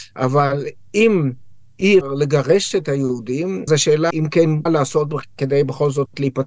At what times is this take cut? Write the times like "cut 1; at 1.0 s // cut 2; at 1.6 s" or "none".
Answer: cut 1; at 2.0 s // cut 2; at 3.7 s // cut 3; at 4.1 s // cut 4; at 4.7 s